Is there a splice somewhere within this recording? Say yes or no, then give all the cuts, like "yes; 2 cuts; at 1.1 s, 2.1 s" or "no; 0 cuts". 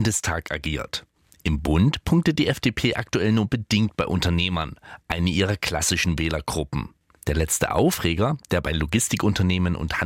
no; 0 cuts